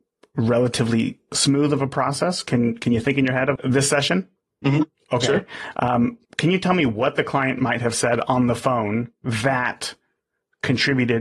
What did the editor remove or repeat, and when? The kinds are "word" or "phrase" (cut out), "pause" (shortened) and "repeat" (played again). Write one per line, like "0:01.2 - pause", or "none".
0:03.6 - word
0:04.4 - pause
0:06.2 - pause